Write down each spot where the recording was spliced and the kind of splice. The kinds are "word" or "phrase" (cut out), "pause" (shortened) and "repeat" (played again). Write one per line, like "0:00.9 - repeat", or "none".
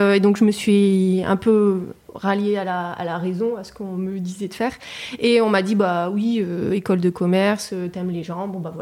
none